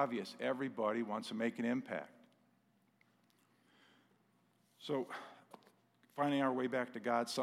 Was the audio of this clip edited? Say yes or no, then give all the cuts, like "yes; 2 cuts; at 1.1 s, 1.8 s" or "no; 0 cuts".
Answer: no; 0 cuts